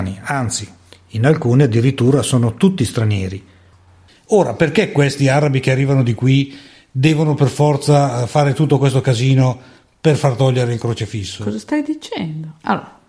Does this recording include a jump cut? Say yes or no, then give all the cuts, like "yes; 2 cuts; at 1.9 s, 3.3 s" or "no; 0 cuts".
no; 0 cuts